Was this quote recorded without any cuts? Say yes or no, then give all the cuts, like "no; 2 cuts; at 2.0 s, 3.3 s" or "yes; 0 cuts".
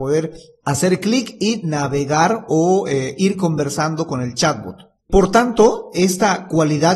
yes; 0 cuts